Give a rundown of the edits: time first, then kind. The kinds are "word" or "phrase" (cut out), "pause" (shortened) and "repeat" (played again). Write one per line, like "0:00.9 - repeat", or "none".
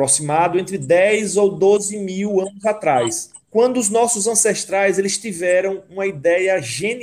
0:03.4 - pause